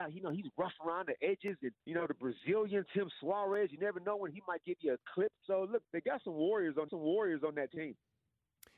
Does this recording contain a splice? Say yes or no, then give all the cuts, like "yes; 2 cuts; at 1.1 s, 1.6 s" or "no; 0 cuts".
yes; 5 cuts; at 1.8 s, 4.6 s, 5.4 s, 5.8 s, 6.9 s